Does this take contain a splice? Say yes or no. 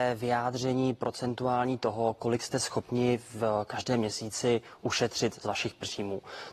no